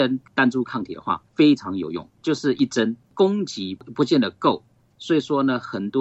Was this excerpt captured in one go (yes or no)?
no